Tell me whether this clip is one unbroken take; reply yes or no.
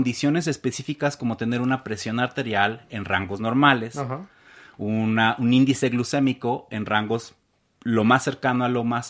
yes